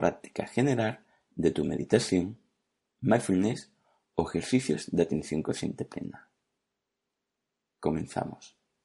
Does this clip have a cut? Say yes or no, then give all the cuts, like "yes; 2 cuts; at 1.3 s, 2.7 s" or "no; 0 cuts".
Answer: no; 0 cuts